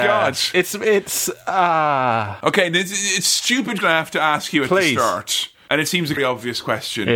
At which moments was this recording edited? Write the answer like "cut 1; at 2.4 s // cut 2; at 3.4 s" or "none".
cut 1; at 3.8 s // cut 2; at 6.2 s